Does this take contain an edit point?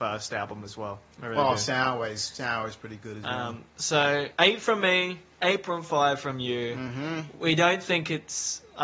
yes; 2 cuts; at 1.1 s, 4.3 s

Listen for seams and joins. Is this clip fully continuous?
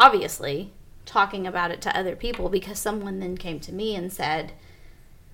yes; 0 cuts

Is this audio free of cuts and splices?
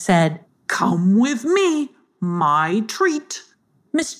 yes; 0 cuts

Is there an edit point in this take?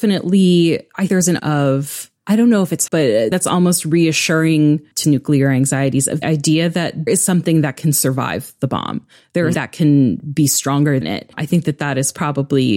yes; 9 cuts; at 1.1 s, 1.4 s, 2.9 s, 3.3 s, 5.0 s, 6.2 s, 7.1 s, 9.5 s, 11.0 s

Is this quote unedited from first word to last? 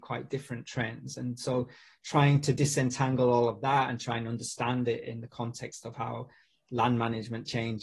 yes; 0 cuts

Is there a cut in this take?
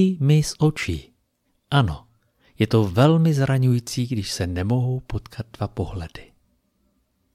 no; 0 cuts

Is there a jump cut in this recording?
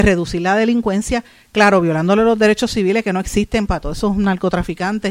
no; 0 cuts

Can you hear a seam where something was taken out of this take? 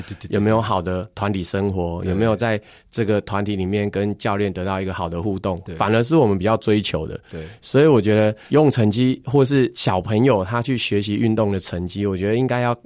no; 0 cuts

